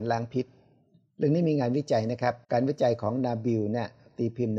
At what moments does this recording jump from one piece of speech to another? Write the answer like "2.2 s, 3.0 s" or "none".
2.4 s